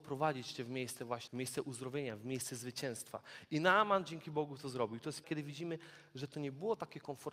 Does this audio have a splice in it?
yes; 2 cuts; at 1.3 s, 5.2 s

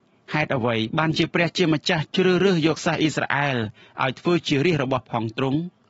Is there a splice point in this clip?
no; 0 cuts

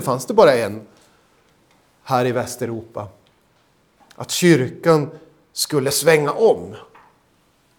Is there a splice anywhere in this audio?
no; 0 cuts

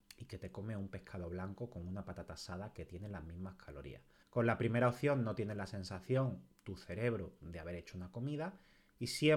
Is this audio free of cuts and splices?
no; 1 cut; at 4.2 s

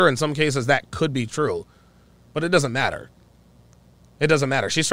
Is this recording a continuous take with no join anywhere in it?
yes; 0 cuts

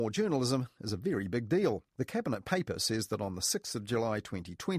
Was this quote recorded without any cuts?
no; 1 cut; at 1.9 s

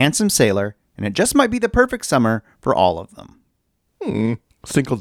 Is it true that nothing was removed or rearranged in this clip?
yes; 0 cuts

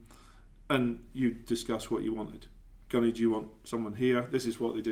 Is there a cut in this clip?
no; 0 cuts

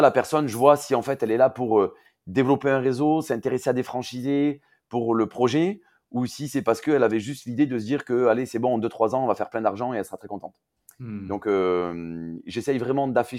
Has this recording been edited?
no; 0 cuts

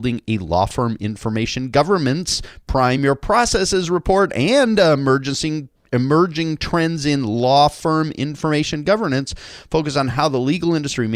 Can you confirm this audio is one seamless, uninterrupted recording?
yes; 0 cuts

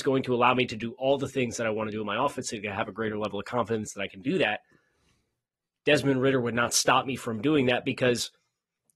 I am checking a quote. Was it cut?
no; 0 cuts

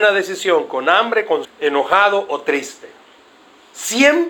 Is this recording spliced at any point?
yes; 1 cut; at 1.4 s

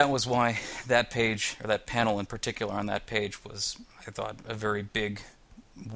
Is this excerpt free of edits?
yes; 0 cuts

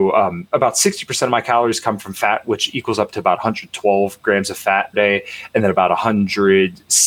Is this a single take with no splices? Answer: no; 1 cut; at 4.9 s

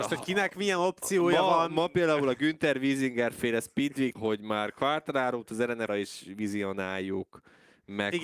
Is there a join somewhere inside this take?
yes; 2 cuts; at 4.1 s, 5.9 s

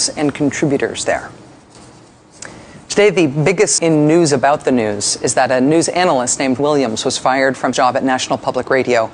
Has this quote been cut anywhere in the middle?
yes; 3 cuts; at 3.8 s, 6.6 s, 7.7 s

